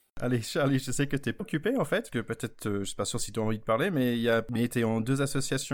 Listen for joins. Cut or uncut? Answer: cut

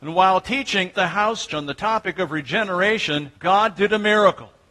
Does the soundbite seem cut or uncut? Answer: cut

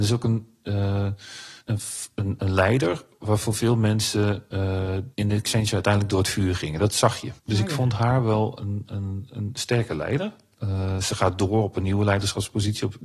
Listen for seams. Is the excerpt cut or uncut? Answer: cut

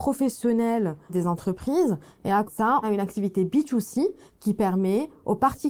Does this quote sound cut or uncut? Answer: cut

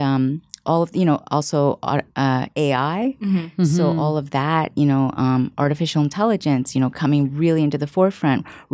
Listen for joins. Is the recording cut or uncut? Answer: cut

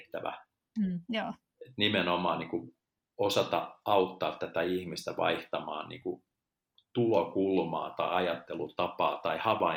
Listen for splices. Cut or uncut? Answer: uncut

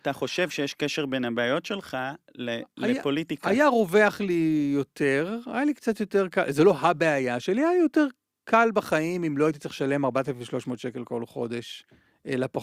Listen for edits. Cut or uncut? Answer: uncut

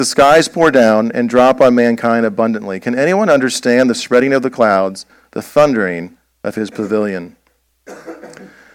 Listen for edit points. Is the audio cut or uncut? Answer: uncut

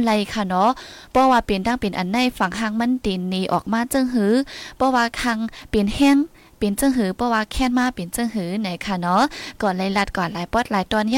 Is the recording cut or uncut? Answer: uncut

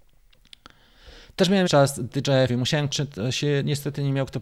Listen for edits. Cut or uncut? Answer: cut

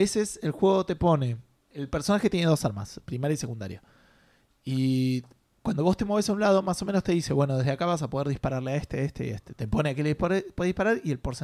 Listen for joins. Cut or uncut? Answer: uncut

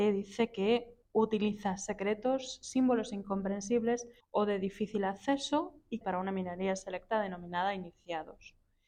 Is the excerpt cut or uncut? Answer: cut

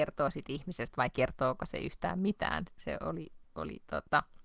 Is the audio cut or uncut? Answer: uncut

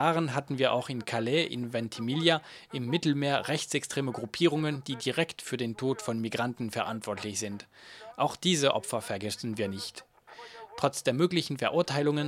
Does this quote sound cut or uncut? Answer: uncut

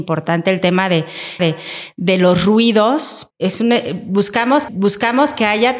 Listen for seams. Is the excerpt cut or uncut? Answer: cut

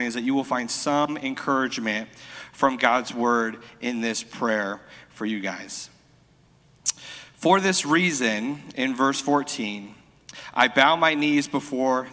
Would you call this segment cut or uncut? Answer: uncut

